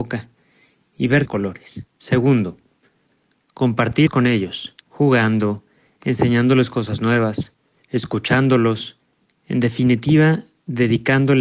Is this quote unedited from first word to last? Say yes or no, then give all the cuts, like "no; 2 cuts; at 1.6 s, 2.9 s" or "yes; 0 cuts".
no; 5 cuts; at 1.3 s, 1.9 s, 4.1 s, 4.8 s, 7.8 s